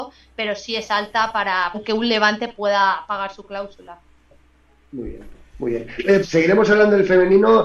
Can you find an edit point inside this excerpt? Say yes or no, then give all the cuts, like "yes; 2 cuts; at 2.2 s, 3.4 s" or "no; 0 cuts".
yes; 2 cuts; at 1.7 s, 6.2 s